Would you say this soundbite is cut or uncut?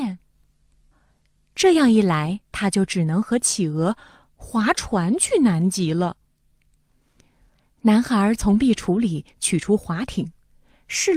cut